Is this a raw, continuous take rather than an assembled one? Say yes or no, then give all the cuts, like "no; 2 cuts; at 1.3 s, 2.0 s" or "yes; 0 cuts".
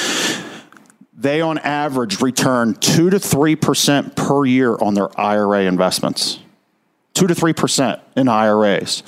yes; 0 cuts